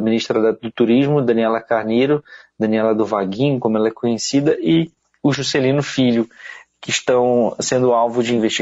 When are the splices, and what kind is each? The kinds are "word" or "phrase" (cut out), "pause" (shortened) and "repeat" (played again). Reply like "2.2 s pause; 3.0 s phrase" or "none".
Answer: none